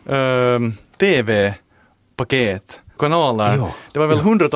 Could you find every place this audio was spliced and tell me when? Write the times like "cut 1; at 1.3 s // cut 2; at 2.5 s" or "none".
cut 1; at 0.9 s // cut 2; at 3.0 s